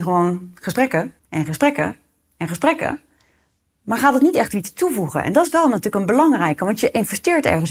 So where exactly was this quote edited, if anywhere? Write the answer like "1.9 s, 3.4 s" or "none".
1.2 s